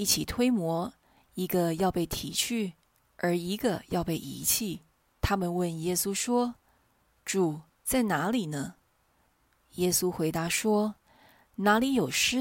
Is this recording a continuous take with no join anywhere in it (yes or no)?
no